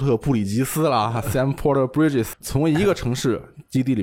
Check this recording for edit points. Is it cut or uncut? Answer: cut